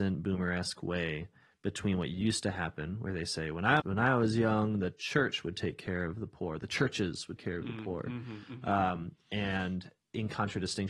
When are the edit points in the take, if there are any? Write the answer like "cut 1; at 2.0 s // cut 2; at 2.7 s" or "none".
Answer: cut 1; at 3.8 s // cut 2; at 7.4 s